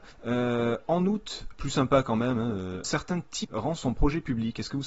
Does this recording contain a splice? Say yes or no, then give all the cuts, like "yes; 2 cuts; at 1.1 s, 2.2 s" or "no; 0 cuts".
yes; 3 cuts; at 1.5 s, 2.8 s, 3.4 s